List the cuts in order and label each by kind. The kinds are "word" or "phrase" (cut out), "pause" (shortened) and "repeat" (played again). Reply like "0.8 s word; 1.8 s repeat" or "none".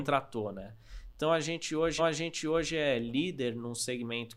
2.0 s repeat